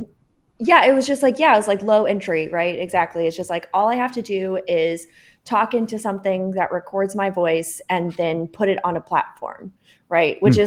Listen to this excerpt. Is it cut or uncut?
uncut